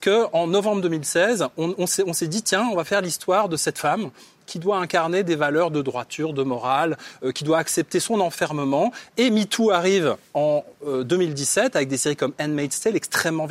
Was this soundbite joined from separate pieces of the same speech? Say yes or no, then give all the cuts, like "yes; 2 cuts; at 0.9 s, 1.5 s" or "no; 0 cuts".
no; 0 cuts